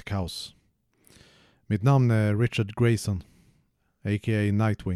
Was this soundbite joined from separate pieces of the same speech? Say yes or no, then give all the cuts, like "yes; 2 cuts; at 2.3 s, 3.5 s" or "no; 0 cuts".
no; 0 cuts